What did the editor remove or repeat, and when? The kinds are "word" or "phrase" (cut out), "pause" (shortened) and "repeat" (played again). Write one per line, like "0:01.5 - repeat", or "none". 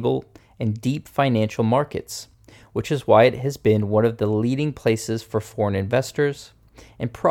none